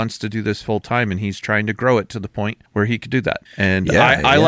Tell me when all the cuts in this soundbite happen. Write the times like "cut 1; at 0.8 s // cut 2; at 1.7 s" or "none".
cut 1; at 2.7 s // cut 2; at 3.5 s